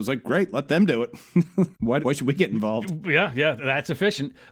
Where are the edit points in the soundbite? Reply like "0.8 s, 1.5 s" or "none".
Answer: 2.0 s, 3.6 s